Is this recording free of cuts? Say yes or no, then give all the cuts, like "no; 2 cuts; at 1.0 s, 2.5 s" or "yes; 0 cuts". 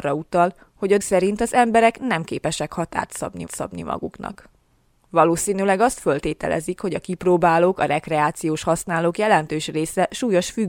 no; 2 cuts; at 1.0 s, 3.5 s